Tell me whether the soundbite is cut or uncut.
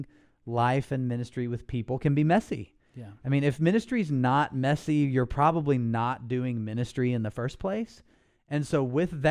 uncut